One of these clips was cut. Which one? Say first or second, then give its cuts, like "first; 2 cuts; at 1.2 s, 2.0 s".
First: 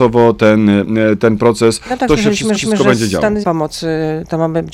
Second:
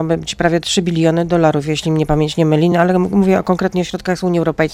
first; 2 cuts; at 2.6 s, 3.4 s